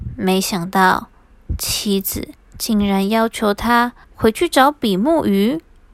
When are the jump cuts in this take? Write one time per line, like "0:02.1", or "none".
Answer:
0:04.0